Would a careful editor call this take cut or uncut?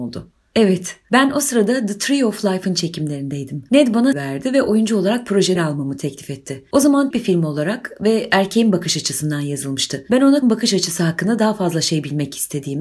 cut